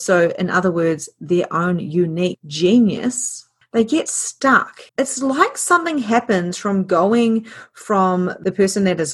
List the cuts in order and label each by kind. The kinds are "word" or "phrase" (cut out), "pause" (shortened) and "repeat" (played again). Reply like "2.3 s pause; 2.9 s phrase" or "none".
4.9 s pause